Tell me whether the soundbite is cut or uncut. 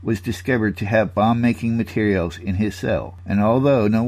uncut